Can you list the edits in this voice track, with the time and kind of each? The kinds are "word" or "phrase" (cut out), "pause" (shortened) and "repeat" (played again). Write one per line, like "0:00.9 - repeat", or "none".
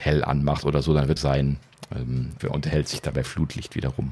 0:01.2 - phrase
0:02.4 - phrase
0:03.1 - word